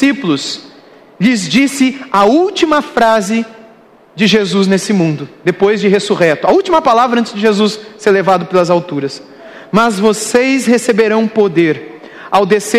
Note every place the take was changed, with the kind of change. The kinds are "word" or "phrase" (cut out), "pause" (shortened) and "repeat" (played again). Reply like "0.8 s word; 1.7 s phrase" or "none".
none